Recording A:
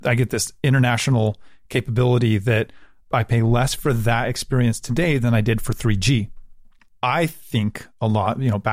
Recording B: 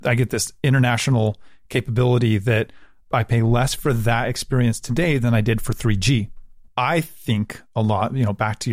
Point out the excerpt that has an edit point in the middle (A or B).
B